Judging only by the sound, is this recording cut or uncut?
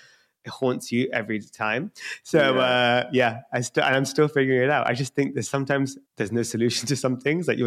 cut